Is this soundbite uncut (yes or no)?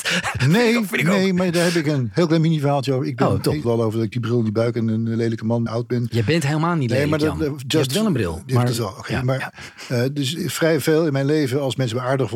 no